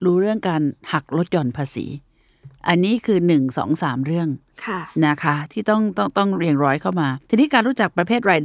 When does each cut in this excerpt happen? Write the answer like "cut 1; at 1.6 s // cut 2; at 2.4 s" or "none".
cut 1; at 7.2 s

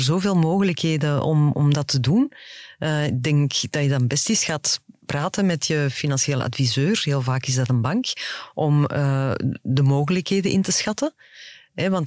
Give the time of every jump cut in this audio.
none

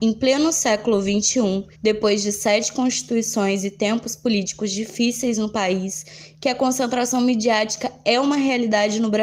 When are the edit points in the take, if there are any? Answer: cut 1; at 1.7 s

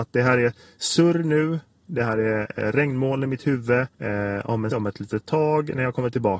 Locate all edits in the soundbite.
cut 1; at 3.9 s // cut 2; at 4.7 s

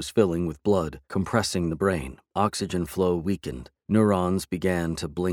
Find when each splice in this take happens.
cut 1; at 1.0 s // cut 2; at 2.3 s // cut 3; at 3.8 s

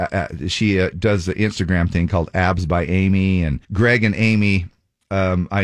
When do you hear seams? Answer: cut 1; at 3.6 s

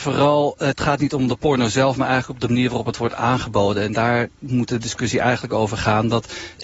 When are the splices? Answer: none

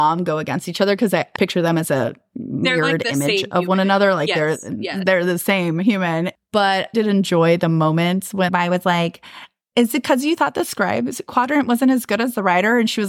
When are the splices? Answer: cut 1; at 1.4 s // cut 2; at 6.9 s // cut 3; at 8.5 s

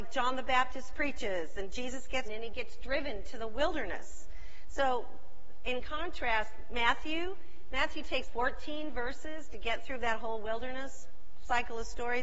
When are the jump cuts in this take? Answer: cut 1; at 2.2 s // cut 2; at 8.3 s

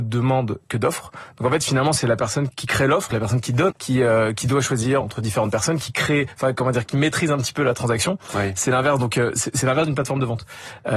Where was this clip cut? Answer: cut 1; at 2.5 s // cut 2; at 3.1 s // cut 3; at 3.7 s // cut 4; at 5.0 s

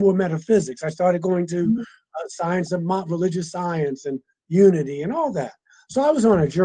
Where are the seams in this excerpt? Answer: none

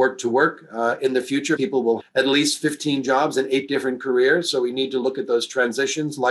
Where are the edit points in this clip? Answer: cut 1; at 1.6 s // cut 2; at 2.0 s

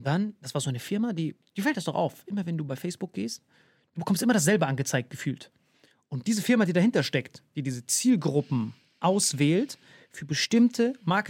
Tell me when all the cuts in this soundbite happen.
none

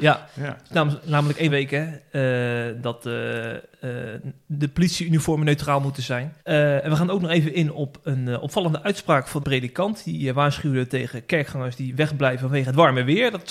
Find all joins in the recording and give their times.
cut 1; at 1.5 s // cut 2; at 6.4 s // cut 3; at 9.4 s

